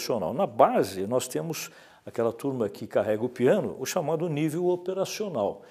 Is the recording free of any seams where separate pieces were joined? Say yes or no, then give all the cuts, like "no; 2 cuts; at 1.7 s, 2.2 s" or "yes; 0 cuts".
yes; 0 cuts